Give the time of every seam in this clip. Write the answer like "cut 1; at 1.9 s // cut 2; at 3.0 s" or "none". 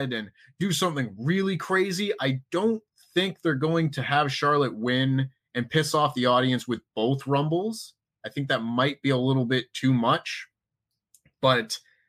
none